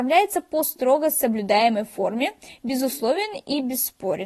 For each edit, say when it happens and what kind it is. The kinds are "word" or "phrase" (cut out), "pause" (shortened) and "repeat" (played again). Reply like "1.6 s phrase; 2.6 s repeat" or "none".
none